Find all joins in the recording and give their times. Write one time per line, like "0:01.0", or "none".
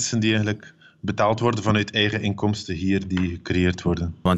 none